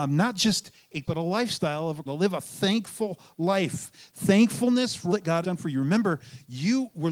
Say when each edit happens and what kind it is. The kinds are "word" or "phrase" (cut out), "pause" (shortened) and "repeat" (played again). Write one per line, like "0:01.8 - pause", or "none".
0:01.0 - word
0:02.1 - word
0:05.1 - word
0:05.4 - word

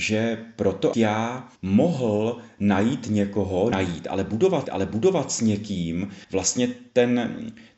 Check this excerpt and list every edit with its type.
0:00.9 - word
0:01.6 - pause
0:03.7 - word
0:04.6 - repeat
0:06.2 - pause

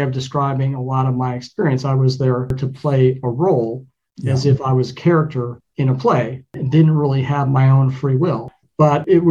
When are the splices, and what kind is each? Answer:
none

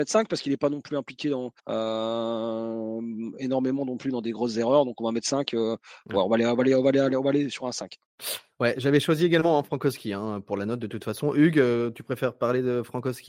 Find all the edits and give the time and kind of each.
0:01.6 - pause

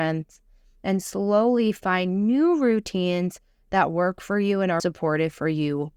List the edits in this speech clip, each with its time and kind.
0:04.8 - word

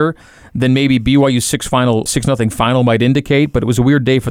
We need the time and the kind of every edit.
0:02.1 - word

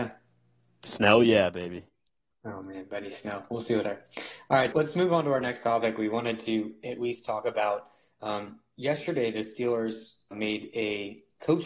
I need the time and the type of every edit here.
0:03.8 - word
0:04.7 - word
0:10.3 - word

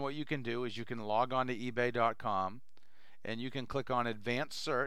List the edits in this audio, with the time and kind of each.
none

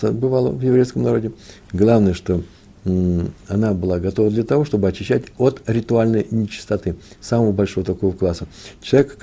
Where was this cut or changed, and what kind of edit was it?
none

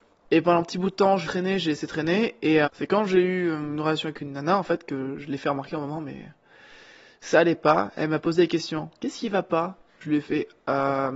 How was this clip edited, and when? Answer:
0:01.2 - word
0:02.6 - word

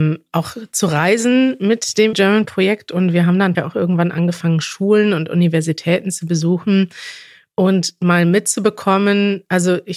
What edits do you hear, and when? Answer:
0:02.1 - word
0:03.5 - word

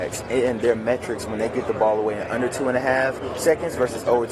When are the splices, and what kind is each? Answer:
none

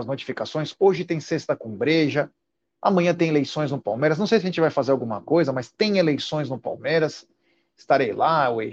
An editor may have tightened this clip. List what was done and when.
none

